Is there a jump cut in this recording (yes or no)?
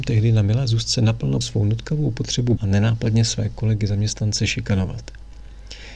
yes